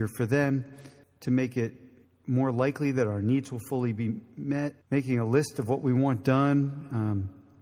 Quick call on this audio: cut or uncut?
cut